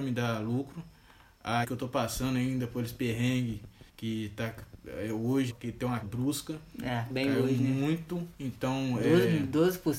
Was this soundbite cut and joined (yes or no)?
yes